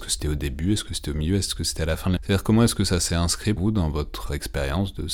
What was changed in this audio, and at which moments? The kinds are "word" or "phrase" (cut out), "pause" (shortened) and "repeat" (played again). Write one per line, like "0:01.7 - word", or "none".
0:02.2 - word
0:03.6 - word